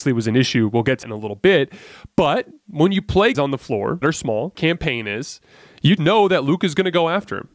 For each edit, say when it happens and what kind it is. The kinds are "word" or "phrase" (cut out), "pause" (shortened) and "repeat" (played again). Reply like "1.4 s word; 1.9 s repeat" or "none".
1.0 s word; 3.3 s word; 4.0 s word; 4.5 s word; 6.0 s word